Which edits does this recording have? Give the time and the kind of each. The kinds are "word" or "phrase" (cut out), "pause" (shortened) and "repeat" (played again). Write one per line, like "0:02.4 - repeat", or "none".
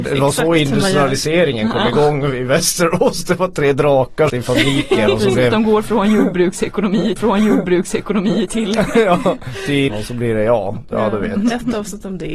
0:04.3 - phrase
0:07.2 - repeat
0:09.9 - word